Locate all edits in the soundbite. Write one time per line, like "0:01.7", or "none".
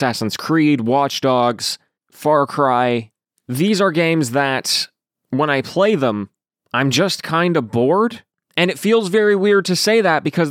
none